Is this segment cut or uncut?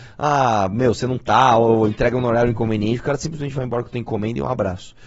uncut